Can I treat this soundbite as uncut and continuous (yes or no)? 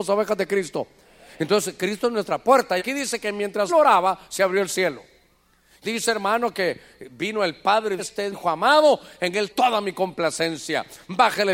no